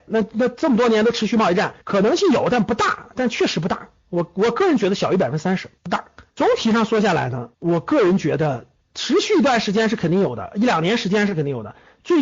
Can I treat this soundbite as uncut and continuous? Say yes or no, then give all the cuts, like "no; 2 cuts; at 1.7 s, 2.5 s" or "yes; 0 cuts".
no; 5 cuts; at 1.8 s, 5.8 s, 6.3 s, 7.5 s, 8.8 s